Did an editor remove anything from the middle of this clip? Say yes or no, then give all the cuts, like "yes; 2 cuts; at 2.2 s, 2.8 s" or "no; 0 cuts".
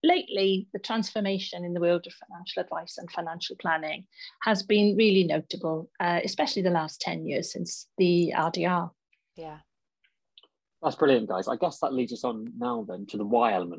no; 0 cuts